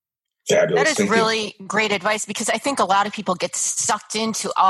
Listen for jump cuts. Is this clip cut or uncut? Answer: uncut